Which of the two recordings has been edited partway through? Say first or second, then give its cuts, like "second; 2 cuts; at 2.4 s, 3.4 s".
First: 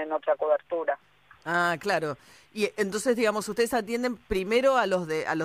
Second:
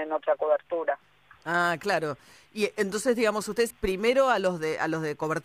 second; 1 cut; at 3.7 s